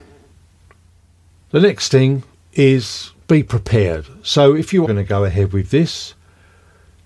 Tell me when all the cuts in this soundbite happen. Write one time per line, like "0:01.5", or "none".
0:02.3
0:04.8